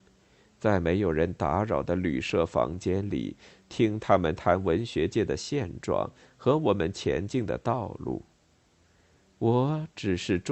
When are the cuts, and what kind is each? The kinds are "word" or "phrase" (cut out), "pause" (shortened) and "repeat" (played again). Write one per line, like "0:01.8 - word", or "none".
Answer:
none

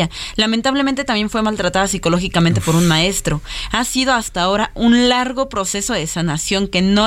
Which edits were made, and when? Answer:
none

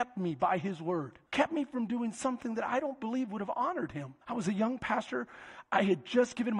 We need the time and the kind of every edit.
0:01.3 - pause
0:04.2 - pause

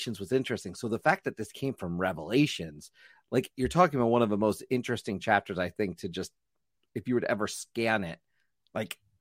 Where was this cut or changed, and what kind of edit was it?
none

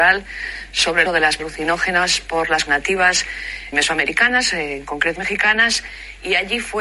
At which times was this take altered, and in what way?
0:01.1 - word
0:01.4 - word
0:02.7 - word
0:03.7 - word
0:05.2 - word

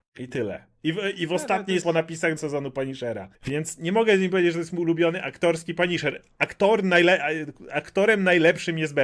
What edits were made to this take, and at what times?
0:01.8 - word
0:02.4 - word
0:03.3 - pause

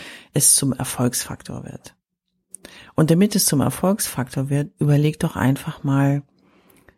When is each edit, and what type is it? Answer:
none

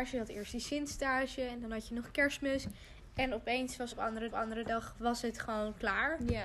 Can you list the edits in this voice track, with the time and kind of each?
0:03.9 - phrase
0:04.3 - repeat

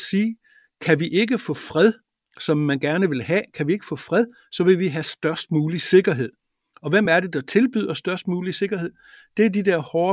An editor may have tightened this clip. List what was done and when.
none

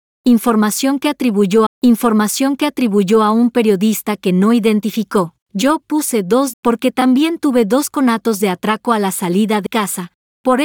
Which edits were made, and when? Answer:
0:01.7 - repeat
0:05.4 - pause
0:06.5 - word
0:09.7 - word

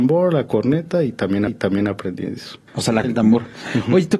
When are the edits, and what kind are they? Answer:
0:01.5 - repeat
0:02.7 - pause
0:03.0 - word

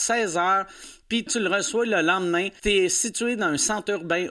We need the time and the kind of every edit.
0:01.3 - word
0:02.6 - word

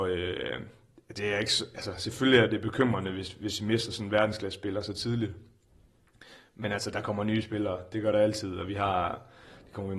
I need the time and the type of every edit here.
none

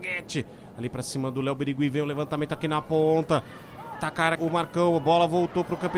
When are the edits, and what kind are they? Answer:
0:04.0 - word
0:04.4 - word

